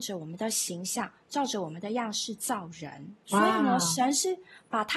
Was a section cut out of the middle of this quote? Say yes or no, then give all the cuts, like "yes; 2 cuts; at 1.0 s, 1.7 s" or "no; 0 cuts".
yes; 1 cut; at 3.2 s